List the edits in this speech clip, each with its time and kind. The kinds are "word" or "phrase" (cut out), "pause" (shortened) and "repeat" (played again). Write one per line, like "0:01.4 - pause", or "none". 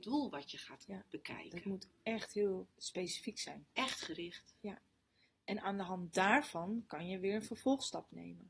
0:02.7 - pause